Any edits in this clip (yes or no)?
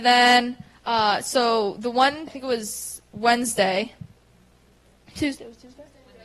yes